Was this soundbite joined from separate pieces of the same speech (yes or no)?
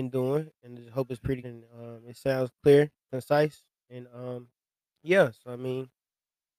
yes